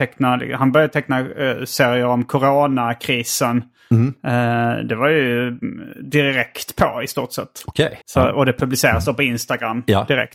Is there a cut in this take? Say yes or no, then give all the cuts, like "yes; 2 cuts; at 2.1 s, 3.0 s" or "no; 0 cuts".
yes; 1 cut; at 8.0 s